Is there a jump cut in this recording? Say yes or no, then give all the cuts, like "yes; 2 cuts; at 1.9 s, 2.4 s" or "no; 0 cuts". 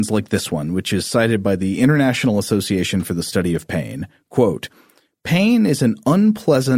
no; 0 cuts